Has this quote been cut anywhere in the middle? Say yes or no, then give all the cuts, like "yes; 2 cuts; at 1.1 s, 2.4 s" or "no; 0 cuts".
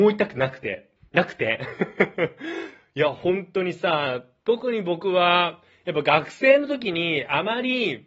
yes; 1 cut; at 1.0 s